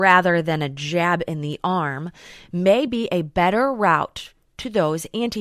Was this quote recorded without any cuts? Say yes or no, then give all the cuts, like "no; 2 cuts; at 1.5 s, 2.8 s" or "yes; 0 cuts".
yes; 0 cuts